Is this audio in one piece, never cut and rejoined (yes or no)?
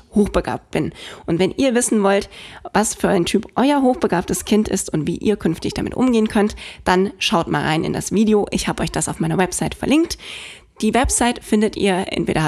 yes